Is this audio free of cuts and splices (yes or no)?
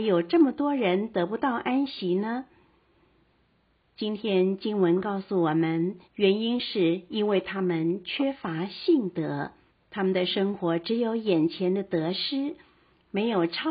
no